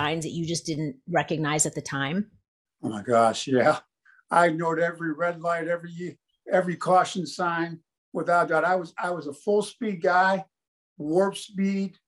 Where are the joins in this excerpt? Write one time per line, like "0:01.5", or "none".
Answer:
none